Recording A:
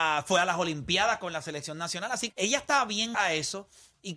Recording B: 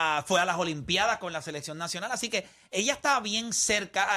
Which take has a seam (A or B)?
A